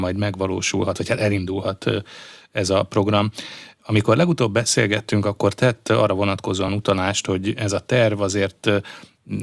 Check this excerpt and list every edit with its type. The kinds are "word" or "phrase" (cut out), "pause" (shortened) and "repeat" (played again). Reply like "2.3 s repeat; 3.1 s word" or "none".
none

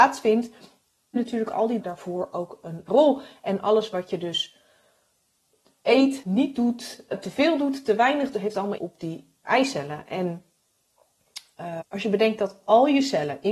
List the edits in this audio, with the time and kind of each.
1.2 s word; 1.8 s word; 2.9 s word; 6.2 s word; 7.1 s word; 8.3 s word; 8.8 s word; 9.4 s word; 11.8 s word

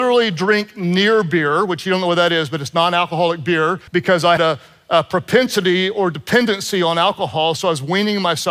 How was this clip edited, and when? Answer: 3.9 s pause; 4.4 s word

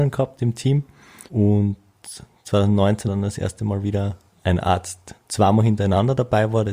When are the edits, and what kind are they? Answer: 1.3 s pause; 3.1 s word; 3.8 s word; 4.3 s word; 5.2 s pause

